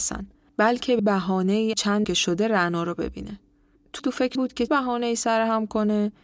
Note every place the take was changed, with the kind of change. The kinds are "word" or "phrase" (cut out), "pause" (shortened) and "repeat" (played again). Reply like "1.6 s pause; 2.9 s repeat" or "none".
1.0 s word; 1.7 s word; 2.0 s word; 4.0 s word; 4.4 s word; 4.7 s word